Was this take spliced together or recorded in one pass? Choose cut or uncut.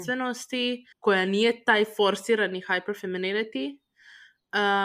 cut